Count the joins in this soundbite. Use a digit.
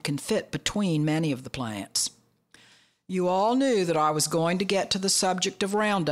0